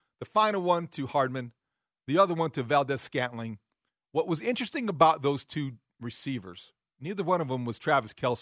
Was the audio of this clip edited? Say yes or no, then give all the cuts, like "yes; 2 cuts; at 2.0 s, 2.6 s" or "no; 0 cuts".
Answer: no; 0 cuts